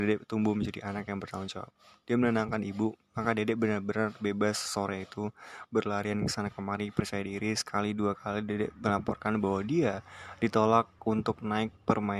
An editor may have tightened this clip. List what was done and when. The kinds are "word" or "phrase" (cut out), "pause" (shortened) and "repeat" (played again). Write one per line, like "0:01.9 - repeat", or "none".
none